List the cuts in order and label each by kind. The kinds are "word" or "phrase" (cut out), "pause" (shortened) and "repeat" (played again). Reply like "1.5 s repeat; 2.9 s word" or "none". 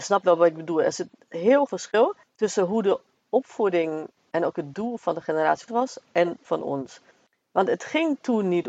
1.7 s word; 2.2 s pause; 4.2 s word; 5.7 s phrase; 6.4 s word; 7.1 s pause